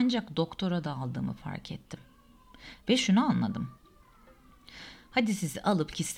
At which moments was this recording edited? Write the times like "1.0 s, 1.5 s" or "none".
2.8 s